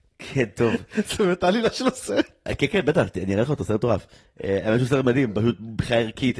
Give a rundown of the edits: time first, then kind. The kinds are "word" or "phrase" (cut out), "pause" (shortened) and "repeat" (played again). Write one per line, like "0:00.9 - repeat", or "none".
none